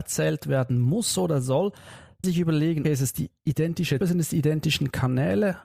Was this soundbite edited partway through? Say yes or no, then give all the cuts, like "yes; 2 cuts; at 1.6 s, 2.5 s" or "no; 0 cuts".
yes; 3 cuts; at 2.2 s, 2.8 s, 4.0 s